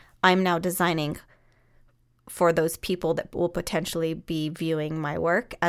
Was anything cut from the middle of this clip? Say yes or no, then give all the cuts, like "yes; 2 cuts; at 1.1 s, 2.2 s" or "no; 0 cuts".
no; 0 cuts